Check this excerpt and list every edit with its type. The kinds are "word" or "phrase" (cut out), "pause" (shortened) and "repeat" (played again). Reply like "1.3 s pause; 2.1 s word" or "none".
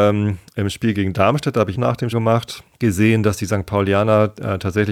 0.9 s word; 1.7 s phrase; 2.1 s word; 2.7 s pause